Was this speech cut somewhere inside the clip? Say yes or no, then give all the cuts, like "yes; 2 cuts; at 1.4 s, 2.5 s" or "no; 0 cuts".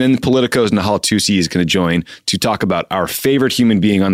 no; 0 cuts